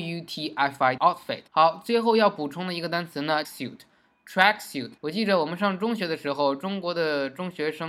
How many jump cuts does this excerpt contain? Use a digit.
4